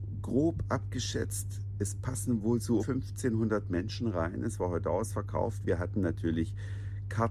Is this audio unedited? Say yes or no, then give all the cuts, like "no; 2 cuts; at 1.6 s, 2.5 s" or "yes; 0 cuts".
no; 1 cut; at 2.8 s